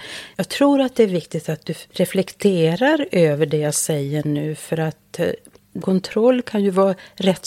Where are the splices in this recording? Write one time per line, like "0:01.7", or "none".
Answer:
0:05.8